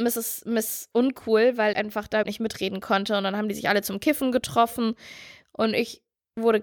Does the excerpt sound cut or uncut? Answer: cut